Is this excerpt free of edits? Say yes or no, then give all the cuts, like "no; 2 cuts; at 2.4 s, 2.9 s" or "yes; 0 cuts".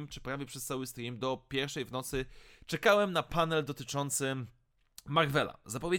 yes; 0 cuts